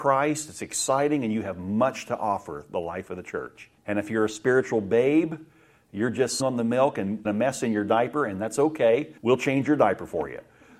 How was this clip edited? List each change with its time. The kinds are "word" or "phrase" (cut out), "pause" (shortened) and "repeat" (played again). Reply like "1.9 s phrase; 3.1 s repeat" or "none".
3.8 s pause; 6.4 s word; 7.2 s word; 9.2 s pause